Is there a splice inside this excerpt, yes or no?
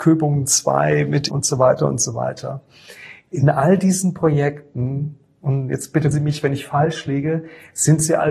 yes